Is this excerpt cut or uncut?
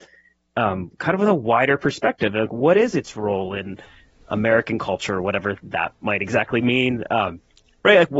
uncut